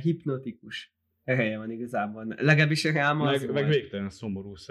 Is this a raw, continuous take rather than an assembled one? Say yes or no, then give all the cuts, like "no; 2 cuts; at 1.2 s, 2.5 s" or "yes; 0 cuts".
yes; 0 cuts